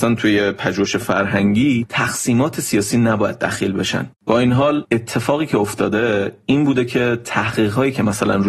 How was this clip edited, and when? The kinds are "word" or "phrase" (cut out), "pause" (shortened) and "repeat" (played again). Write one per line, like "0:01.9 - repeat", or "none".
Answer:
0:04.2 - pause